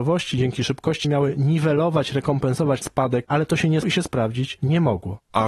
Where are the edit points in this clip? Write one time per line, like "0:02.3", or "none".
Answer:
0:01.0
0:02.8
0:03.2
0:03.8